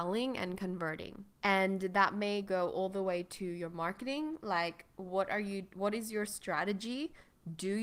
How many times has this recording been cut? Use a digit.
1